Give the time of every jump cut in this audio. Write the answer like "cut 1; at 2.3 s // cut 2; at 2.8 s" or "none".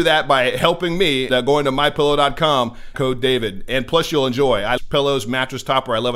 cut 1; at 1.3 s // cut 2; at 2.9 s // cut 3; at 4.8 s